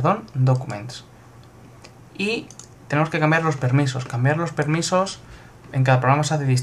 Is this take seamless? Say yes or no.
yes